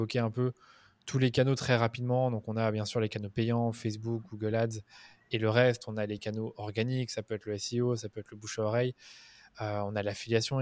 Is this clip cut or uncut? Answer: uncut